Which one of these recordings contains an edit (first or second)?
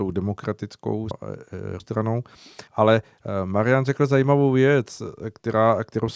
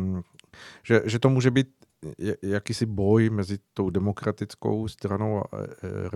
first